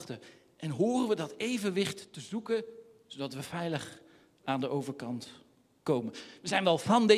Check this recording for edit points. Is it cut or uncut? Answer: uncut